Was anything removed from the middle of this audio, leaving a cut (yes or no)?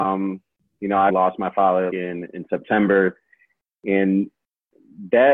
yes